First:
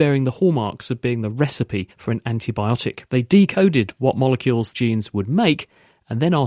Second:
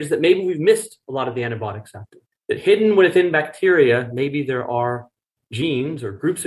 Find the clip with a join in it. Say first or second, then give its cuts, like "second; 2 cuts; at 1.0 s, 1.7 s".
first; 3 cuts; at 1.9 s, 3.1 s, 4.7 s